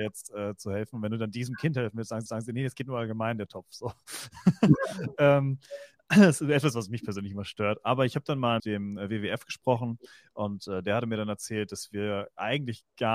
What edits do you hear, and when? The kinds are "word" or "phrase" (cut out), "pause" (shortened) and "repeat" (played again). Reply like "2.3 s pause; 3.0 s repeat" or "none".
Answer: 2.3 s repeat; 8.6 s word